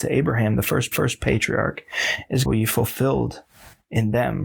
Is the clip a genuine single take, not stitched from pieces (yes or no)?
no